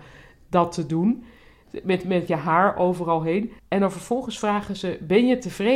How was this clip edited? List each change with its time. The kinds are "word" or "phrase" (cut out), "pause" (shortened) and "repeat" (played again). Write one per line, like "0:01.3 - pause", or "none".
0:03.6 - pause